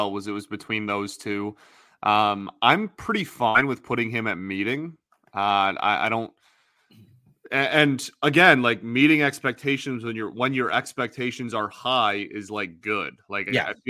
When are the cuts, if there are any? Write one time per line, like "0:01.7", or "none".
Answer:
none